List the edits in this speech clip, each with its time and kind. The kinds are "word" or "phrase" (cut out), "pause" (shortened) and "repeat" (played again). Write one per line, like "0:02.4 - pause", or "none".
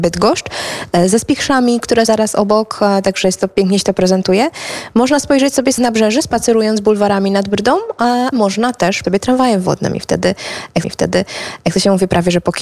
0:02.1 - word
0:05.8 - word
0:08.3 - word
0:09.0 - word
0:10.8 - repeat